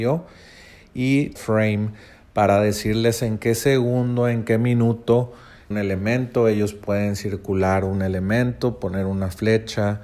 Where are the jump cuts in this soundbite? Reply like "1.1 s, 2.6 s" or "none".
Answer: 1.4 s, 5.7 s